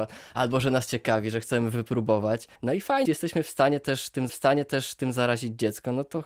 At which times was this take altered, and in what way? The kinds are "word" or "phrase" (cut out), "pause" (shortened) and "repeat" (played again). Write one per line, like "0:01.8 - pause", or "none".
0:02.6 - pause
0:03.0 - word
0:04.3 - repeat